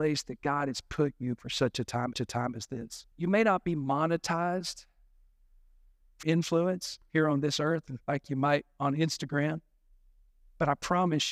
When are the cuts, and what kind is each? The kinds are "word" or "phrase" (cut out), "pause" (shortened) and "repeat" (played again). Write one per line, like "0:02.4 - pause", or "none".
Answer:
0:02.1 - repeat
0:03.1 - pause
0:06.2 - word
0:08.0 - pause